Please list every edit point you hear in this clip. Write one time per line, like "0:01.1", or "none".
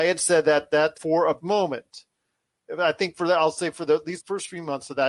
0:00.9
0:01.4
0:04.2